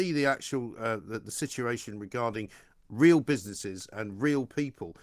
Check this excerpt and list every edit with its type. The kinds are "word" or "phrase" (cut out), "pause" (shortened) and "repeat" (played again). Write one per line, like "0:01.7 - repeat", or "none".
none